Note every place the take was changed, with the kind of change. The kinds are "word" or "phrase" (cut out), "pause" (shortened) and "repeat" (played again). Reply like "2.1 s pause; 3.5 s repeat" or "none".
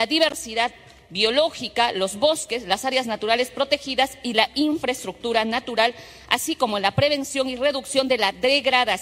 none